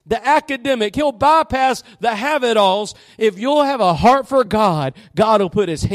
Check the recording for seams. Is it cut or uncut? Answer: uncut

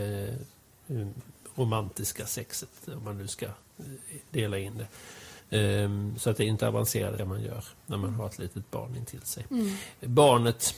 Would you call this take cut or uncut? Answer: cut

